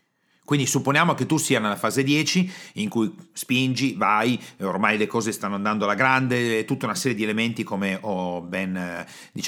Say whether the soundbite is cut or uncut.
uncut